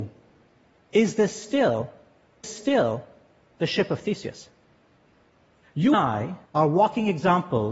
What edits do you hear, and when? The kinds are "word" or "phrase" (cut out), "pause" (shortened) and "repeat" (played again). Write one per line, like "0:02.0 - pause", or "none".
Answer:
0:02.4 - repeat
0:05.9 - word
0:06.5 - pause